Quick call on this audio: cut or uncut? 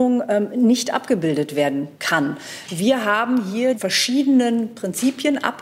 cut